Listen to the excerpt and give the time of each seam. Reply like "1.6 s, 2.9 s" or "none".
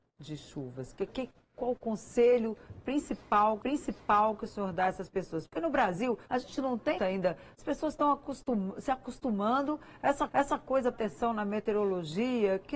1.1 s, 3.6 s, 6.2 s, 7.0 s, 10.3 s, 10.9 s